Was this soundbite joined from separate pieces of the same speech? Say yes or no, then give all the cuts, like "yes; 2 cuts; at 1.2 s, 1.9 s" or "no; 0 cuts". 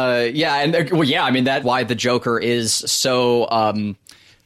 yes; 2 cuts; at 1.6 s, 2.8 s